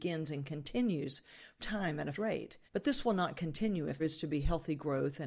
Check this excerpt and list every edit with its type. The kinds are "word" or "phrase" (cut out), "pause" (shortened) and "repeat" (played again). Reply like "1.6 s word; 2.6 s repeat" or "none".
1.6 s word; 2.1 s word; 2.7 s pause; 4.0 s word